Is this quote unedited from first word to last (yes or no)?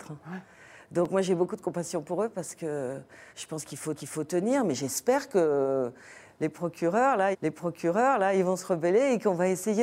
no